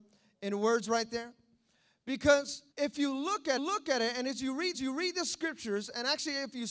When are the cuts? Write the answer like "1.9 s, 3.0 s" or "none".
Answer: 2.7 s, 3.6 s, 4.7 s